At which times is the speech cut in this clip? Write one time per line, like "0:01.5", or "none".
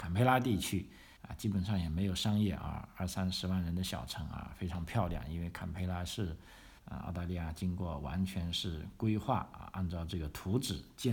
0:01.2
0:06.8